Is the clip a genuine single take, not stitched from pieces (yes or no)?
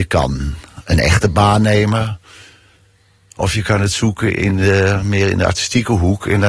yes